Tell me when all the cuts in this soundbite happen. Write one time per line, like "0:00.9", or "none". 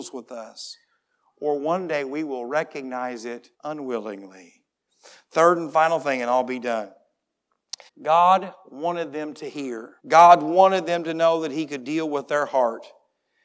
0:03.5
0:07.9
0:10.0